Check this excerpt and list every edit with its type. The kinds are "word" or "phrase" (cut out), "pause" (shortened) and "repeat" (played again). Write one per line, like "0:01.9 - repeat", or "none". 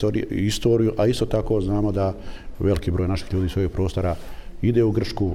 none